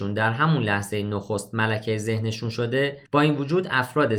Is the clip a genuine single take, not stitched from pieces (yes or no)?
no